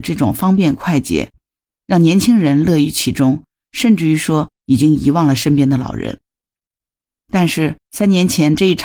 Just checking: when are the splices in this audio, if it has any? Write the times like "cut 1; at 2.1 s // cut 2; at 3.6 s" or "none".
none